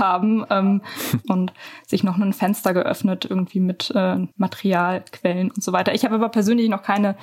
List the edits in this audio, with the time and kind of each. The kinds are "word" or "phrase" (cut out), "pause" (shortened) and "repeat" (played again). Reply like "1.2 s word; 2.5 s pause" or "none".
4.3 s pause